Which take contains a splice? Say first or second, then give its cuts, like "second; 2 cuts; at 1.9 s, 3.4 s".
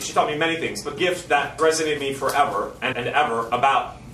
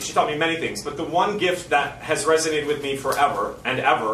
first; 4 cuts; at 1.0 s, 1.6 s, 2.0 s, 2.9 s